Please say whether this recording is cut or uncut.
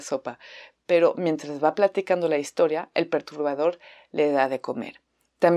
uncut